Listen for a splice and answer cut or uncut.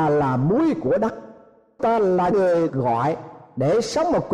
cut